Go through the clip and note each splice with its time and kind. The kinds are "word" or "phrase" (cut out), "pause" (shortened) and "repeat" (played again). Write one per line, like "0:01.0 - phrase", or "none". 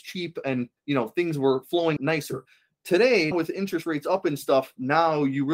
0:02.0 - phrase
0:03.3 - word